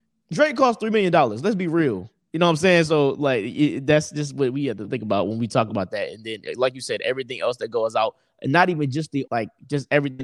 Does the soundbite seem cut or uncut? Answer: cut